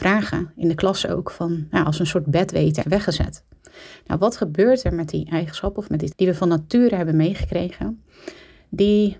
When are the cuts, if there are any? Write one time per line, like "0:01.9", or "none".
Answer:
0:02.8
0:06.1